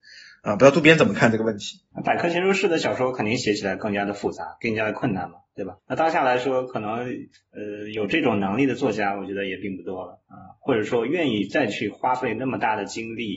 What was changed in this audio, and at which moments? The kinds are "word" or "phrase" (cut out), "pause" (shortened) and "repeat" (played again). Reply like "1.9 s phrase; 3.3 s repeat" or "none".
1.9 s pause; 5.8 s pause; 7.3 s pause